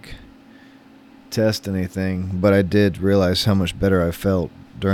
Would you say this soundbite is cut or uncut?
uncut